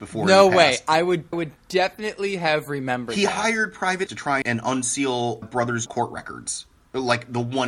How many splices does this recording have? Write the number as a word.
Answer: five